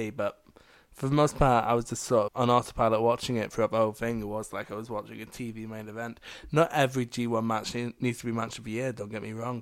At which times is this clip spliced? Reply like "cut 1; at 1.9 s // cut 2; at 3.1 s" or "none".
cut 1; at 2.3 s